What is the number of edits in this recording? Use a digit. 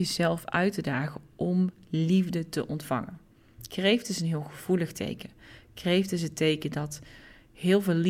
0